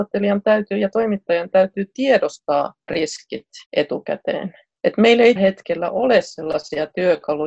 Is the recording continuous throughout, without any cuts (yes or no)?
no